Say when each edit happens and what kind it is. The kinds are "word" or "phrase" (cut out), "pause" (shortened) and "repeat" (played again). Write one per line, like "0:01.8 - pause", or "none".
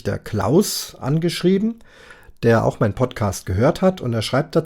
none

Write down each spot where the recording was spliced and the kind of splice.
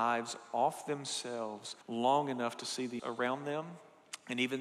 0:01.8 - pause
0:03.0 - word

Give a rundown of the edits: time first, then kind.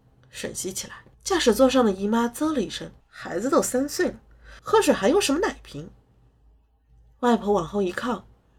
0:01.1 - pause
0:03.0 - pause
0:04.6 - pause

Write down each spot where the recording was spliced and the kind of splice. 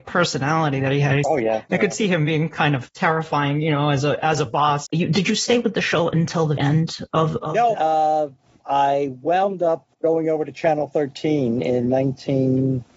0:01.2 - word
0:06.6 - word
0:07.7 - word
0:09.9 - pause

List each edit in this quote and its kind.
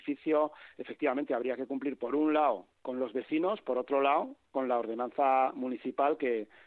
0:02.7 - pause

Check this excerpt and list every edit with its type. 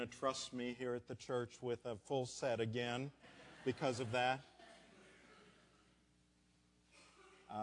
none

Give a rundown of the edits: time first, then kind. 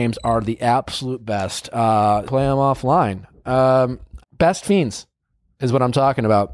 0:02.3 - phrase
0:04.2 - word

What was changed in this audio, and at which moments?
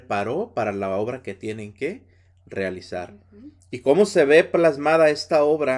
none

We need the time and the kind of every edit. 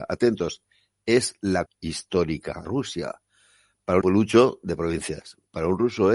0:01.7 - word
0:02.6 - word
0:04.0 - phrase

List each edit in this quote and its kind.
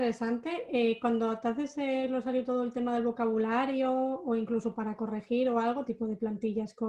0:05.9 - phrase

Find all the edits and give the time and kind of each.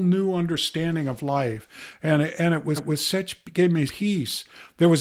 0:02.8 - repeat
0:03.9 - word

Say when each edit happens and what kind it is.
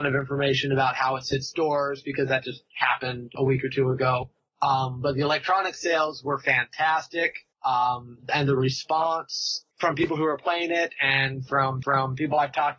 0:04.4 - pause
0:07.5 - pause
0:09.7 - pause
0:11.8 - repeat

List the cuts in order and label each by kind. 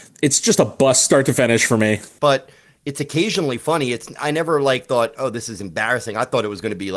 none

